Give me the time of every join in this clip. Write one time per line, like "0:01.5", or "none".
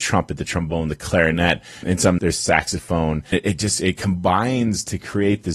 0:01.8
0:02.2
0:03.3